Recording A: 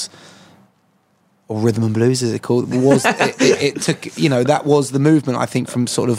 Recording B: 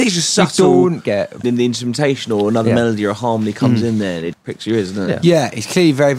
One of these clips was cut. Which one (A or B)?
B